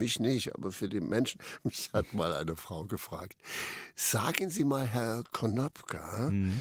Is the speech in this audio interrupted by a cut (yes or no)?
no